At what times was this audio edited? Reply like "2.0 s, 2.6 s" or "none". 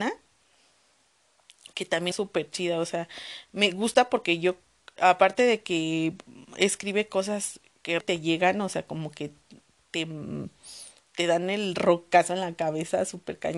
2.1 s, 8.0 s